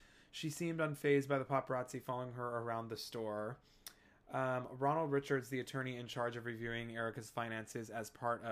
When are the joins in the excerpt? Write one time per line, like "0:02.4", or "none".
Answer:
none